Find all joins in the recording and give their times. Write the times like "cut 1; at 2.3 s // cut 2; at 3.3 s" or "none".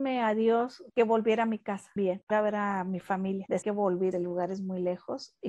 cut 1; at 2.0 s // cut 2; at 2.3 s // cut 3; at 3.6 s // cut 4; at 4.1 s

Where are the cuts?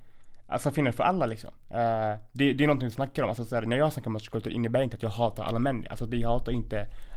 none

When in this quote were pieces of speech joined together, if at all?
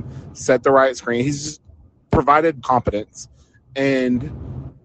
cut 1; at 2.6 s

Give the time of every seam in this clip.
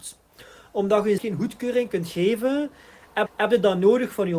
cut 1; at 1.2 s // cut 2; at 3.3 s

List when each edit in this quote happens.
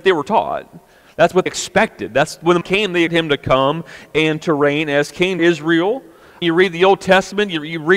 cut 1; at 1.5 s // cut 2; at 2.6 s // cut 3; at 3.1 s // cut 4; at 5.4 s // cut 5; at 6.4 s

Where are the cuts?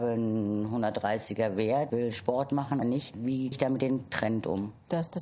cut 1; at 1.9 s // cut 2; at 2.8 s // cut 3; at 3.5 s

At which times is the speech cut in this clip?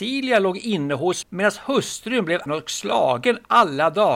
cut 1; at 1.2 s // cut 2; at 2.5 s

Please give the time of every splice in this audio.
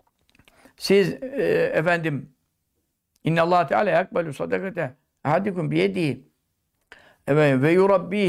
none

